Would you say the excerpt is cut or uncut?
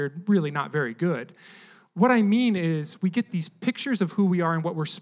uncut